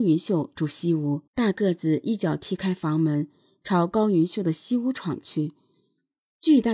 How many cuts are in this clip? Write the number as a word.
one